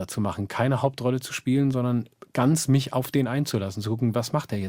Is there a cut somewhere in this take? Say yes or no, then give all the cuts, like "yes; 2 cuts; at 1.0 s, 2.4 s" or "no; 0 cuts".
no; 0 cuts